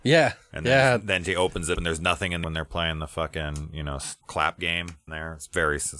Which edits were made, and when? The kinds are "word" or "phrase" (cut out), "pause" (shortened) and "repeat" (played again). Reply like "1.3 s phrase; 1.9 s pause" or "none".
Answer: 1.7 s word; 2.4 s word; 4.2 s word; 5.1 s word